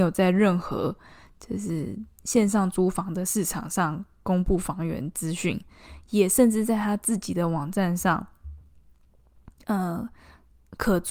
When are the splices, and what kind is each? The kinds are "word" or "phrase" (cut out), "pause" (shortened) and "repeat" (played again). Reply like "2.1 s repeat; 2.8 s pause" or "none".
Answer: none